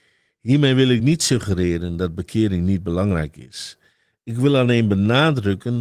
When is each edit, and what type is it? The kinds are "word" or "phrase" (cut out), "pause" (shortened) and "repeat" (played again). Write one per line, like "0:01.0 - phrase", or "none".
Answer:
none